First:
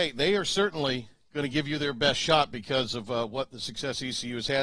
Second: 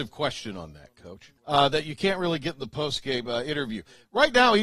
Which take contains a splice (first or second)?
second